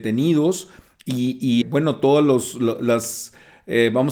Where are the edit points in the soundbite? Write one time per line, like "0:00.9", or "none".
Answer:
0:01.6